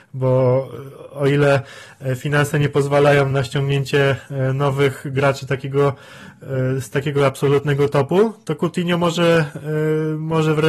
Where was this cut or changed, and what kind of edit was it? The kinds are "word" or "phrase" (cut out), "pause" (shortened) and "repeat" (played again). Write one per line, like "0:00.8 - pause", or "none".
0:03.3 - word